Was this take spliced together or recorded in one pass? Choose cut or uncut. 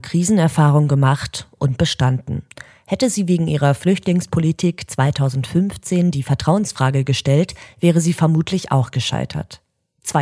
uncut